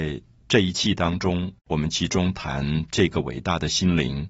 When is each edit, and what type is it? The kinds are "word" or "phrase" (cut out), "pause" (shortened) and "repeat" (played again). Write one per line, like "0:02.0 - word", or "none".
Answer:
0:01.6 - pause